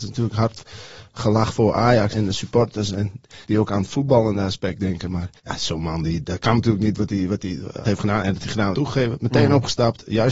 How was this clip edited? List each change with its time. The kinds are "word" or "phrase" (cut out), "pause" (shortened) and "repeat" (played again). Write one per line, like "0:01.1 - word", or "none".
0:02.1 - word
0:03.4 - pause
0:05.4 - pause
0:07.8 - phrase
0:08.4 - word
0:08.7 - phrase